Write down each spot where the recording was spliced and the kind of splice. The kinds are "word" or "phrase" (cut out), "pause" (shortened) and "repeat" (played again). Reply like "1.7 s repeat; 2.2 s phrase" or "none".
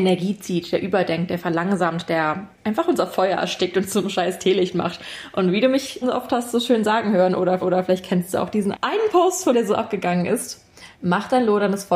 2.5 s pause; 6.0 s word; 7.6 s repeat; 8.7 s word; 9.5 s word; 10.9 s pause